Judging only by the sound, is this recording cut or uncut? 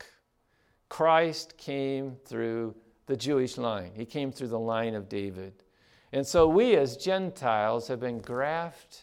uncut